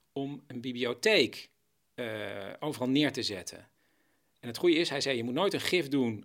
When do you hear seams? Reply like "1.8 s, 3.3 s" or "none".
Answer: none